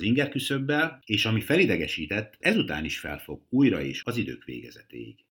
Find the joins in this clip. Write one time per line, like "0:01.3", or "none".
0:02.4
0:04.0